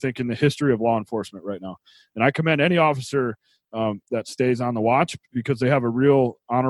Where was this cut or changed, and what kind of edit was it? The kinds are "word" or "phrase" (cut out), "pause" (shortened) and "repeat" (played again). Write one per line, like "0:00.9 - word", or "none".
none